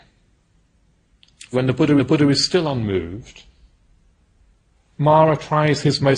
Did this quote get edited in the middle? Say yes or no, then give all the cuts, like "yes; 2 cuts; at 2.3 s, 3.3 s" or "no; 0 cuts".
yes; 2 cuts; at 1.5 s, 2.0 s